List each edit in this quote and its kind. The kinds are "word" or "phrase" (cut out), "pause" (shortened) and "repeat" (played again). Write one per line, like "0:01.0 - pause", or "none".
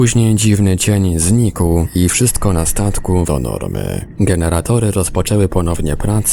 0:03.3 - word